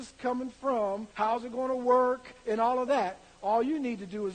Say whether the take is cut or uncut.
cut